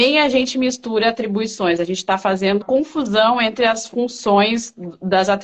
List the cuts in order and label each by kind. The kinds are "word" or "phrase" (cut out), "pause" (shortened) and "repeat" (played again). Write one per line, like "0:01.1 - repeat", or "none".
0:02.6 - phrase